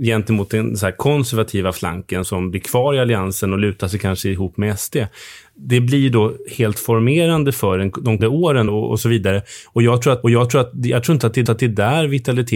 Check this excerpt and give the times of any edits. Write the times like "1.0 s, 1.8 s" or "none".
2.2 s, 8.2 s, 8.7 s, 10.2 s, 11.5 s